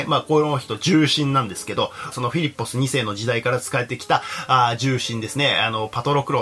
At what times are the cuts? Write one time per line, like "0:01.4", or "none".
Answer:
0:02.1